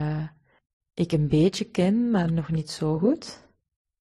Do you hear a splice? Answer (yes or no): no